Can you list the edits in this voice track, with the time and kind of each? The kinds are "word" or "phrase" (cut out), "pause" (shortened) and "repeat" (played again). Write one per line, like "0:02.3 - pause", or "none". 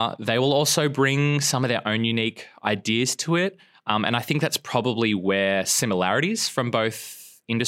none

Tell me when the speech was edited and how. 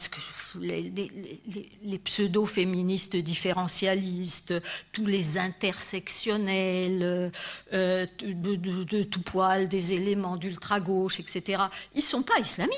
none

